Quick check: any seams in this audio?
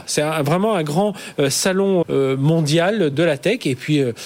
yes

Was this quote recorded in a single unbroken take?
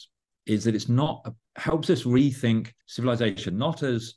no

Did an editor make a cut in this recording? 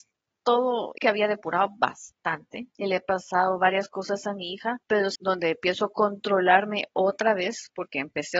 yes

